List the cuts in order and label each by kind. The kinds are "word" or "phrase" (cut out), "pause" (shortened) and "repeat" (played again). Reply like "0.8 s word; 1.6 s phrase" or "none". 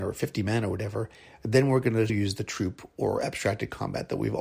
2.1 s word